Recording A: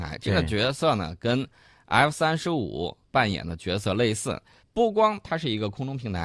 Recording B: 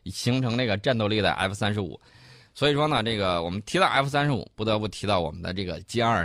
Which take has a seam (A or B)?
A